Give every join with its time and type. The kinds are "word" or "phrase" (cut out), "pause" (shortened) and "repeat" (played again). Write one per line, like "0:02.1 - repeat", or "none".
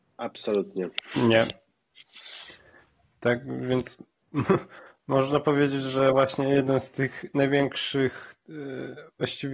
none